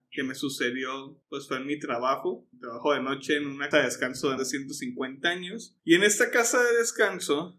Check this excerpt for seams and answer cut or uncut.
cut